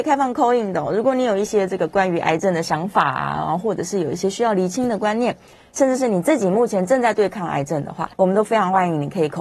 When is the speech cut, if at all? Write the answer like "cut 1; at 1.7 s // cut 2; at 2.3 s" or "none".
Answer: cut 1; at 8.1 s